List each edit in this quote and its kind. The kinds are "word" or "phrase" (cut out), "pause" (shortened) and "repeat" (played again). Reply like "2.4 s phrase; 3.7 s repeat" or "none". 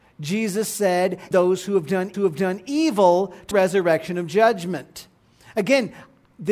1.3 s word; 2.1 s repeat; 3.5 s word